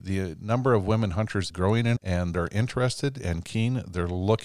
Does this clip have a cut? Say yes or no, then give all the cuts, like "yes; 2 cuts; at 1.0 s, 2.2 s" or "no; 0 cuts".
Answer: yes; 3 cuts; at 1.5 s, 2.0 s, 2.3 s